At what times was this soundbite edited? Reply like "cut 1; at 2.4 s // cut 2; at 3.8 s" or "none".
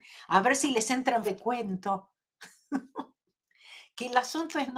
cut 1; at 1.2 s